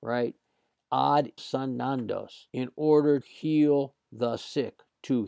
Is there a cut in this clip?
yes; 3 cuts; at 1.4 s, 2.5 s, 3.2 s

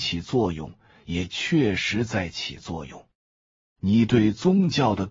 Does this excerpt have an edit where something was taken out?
no; 0 cuts

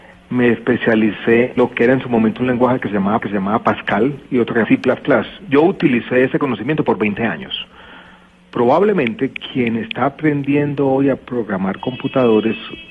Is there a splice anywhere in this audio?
yes; 3 cuts; at 1.6 s, 3.2 s, 4.6 s

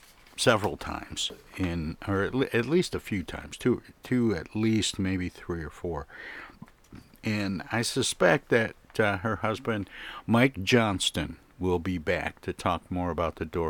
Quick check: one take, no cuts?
yes; 0 cuts

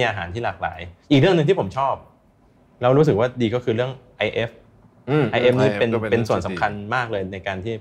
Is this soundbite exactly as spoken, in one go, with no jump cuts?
yes; 0 cuts

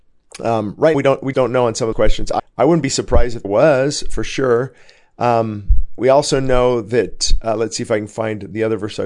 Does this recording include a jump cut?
yes; 6 cuts; at 0.9 s, 1.3 s, 1.9 s, 2.4 s, 3.4 s, 6.0 s

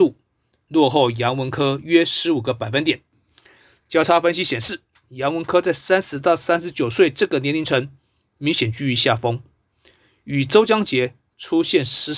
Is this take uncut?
yes; 0 cuts

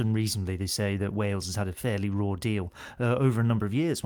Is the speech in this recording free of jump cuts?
yes; 0 cuts

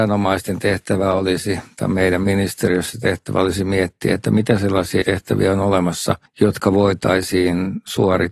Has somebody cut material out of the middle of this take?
yes; 2 cuts; at 5.0 s, 6.3 s

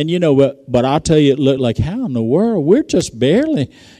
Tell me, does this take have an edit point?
no; 0 cuts

